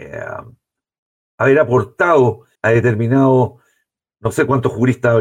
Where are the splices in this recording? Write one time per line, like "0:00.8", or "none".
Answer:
0:02.6